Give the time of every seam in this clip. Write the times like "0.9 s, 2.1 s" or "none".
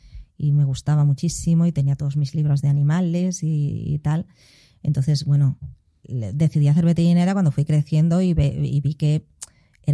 none